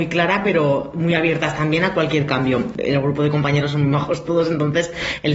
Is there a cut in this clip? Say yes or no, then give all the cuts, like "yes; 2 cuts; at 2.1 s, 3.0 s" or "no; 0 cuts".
no; 0 cuts